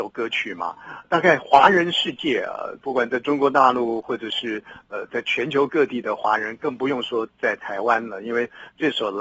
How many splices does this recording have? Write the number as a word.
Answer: one